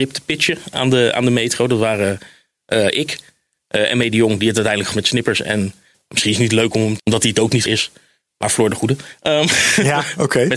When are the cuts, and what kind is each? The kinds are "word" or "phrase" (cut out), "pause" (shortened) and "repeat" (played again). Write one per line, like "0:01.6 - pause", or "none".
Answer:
0:04.9 - word
0:05.9 - word
0:07.0 - word
0:07.7 - word